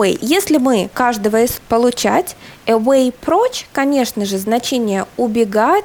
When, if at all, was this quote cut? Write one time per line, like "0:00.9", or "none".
0:00.9
0:01.6